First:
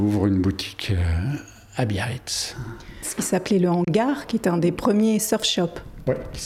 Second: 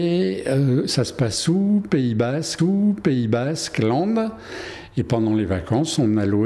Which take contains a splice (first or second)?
second